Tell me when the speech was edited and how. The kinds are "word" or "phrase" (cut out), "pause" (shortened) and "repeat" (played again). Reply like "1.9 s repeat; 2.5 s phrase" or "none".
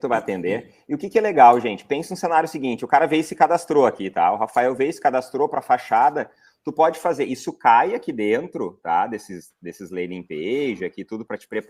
none

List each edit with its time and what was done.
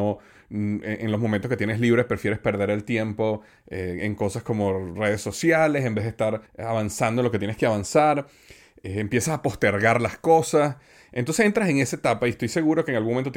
6.5 s pause

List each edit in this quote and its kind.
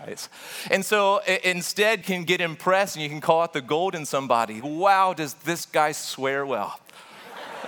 2.0 s word; 4.6 s word

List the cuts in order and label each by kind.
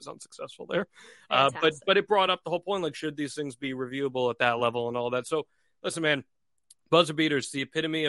none

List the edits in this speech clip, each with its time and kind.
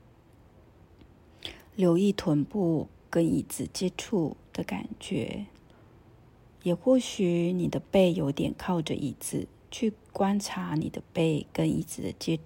5.7 s pause

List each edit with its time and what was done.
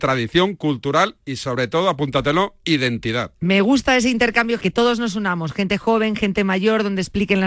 4.6 s word

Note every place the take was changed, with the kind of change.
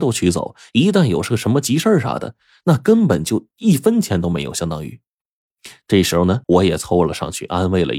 6.4 s pause

